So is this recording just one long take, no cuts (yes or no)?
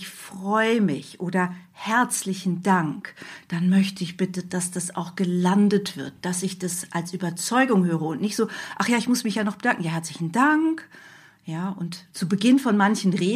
yes